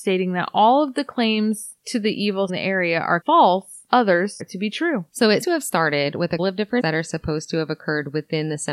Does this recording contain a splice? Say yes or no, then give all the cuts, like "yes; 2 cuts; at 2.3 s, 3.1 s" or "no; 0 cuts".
yes; 6 cuts; at 2.5 s, 3.2 s, 4.4 s, 5.4 s, 6.4 s, 6.8 s